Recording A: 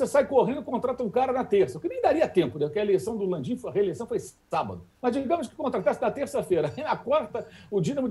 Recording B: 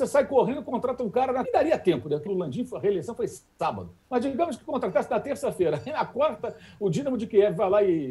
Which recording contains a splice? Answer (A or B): B